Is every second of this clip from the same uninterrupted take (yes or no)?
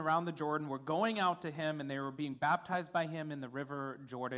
yes